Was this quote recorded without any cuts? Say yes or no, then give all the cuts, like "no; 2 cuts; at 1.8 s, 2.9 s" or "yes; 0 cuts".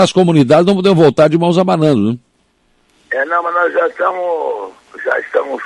yes; 0 cuts